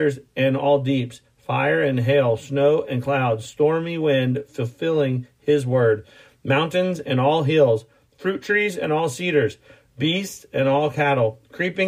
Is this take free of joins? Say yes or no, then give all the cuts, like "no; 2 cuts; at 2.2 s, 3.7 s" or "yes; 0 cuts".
yes; 0 cuts